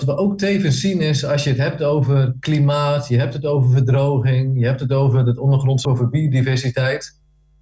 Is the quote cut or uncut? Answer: cut